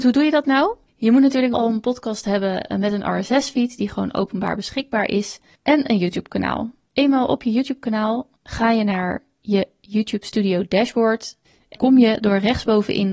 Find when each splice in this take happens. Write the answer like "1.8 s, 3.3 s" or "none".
1.5 s, 8.3 s, 11.7 s